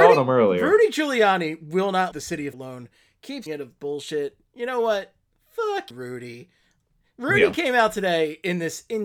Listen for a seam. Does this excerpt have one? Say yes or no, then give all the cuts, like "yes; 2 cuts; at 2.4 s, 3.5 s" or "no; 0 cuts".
yes; 4 cuts; at 2.1 s, 2.5 s, 3.5 s, 5.9 s